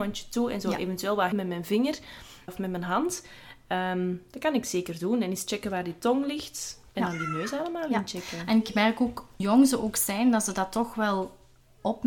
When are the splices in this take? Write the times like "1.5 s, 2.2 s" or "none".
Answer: 1.3 s, 2.5 s, 6.9 s, 9.4 s